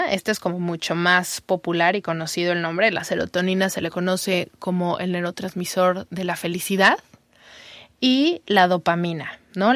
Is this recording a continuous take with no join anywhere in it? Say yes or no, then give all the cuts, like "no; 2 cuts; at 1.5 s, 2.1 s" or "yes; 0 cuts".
yes; 0 cuts